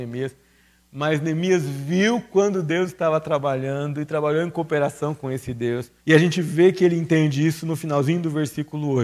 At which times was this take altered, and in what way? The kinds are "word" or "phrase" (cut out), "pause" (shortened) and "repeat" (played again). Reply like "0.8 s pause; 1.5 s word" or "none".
6.0 s pause